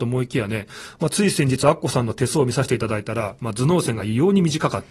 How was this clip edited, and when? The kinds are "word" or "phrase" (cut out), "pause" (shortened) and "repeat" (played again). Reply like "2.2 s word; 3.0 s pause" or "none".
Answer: none